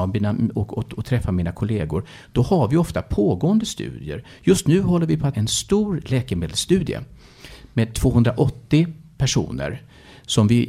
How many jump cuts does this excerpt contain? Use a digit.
1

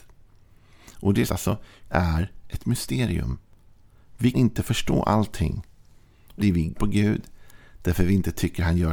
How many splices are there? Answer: 5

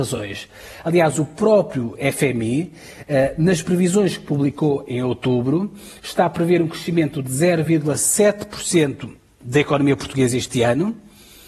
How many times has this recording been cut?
0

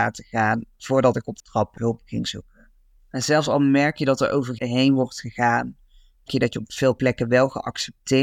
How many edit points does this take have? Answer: 4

